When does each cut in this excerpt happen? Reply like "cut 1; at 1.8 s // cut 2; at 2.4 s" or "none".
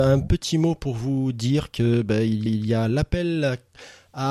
cut 1; at 2.5 s

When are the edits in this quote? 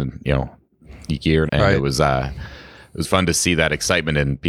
cut 1; at 1.5 s // cut 2; at 3.0 s

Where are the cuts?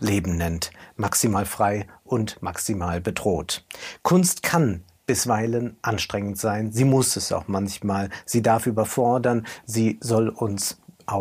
none

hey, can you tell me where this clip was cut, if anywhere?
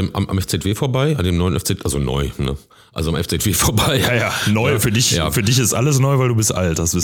none

